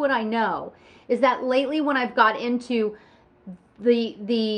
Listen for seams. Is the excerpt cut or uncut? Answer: uncut